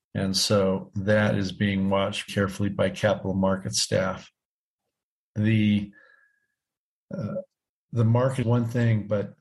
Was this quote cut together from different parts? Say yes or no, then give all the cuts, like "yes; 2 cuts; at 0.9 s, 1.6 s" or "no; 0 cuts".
yes; 2 cuts; at 2.3 s, 8.4 s